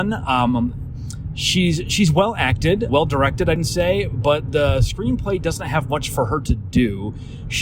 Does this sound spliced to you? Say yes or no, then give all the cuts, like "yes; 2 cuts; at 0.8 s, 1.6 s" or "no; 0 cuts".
yes; 2 cuts; at 2.9 s, 3.6 s